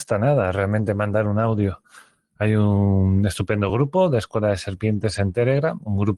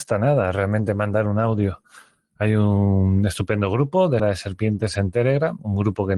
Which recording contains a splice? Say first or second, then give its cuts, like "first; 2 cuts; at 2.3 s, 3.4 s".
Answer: second; 1 cut; at 4.2 s